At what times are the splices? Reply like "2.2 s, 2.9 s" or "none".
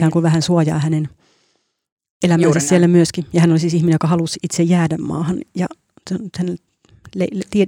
none